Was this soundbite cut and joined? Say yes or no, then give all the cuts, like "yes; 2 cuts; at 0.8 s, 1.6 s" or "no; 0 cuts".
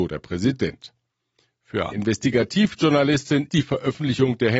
yes; 2 cuts; at 1.9 s, 3.5 s